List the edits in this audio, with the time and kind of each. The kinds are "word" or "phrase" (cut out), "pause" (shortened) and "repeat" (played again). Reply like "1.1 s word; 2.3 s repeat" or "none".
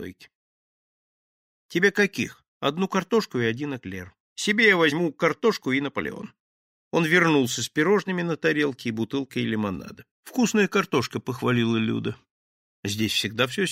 2.5 s pause; 4.2 s pause; 10.1 s pause